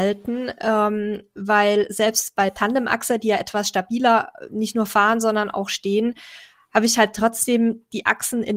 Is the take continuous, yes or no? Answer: yes